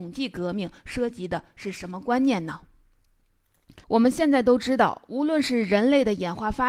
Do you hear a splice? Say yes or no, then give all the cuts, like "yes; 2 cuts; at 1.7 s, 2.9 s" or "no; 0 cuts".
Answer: yes; 1 cut; at 3.8 s